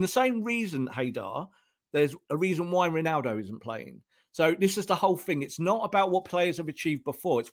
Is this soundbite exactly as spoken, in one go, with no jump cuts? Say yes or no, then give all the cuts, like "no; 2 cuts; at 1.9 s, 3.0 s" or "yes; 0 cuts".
yes; 0 cuts